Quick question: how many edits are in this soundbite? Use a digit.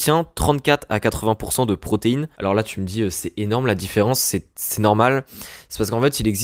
2